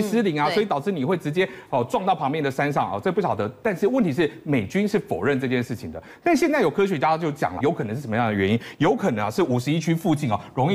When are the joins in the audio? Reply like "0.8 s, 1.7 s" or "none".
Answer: 7.6 s